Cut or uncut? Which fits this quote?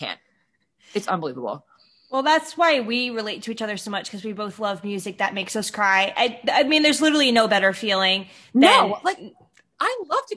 uncut